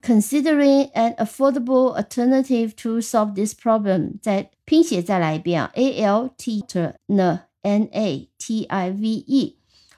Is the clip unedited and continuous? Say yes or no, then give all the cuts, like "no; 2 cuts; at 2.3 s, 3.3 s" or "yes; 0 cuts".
no; 3 cuts; at 4.5 s, 6.6 s, 7.0 s